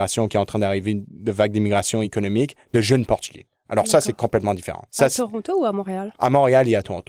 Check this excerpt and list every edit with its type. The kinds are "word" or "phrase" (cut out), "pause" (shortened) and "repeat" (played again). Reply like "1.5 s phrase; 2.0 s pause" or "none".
none